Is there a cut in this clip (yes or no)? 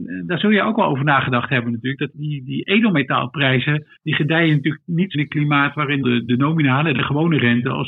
yes